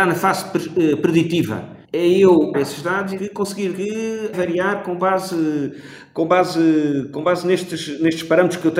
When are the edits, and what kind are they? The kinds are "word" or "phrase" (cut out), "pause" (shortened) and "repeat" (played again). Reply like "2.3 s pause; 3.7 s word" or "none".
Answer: 1.8 s pause; 2.5 s word; 3.2 s word; 3.7 s word; 4.3 s phrase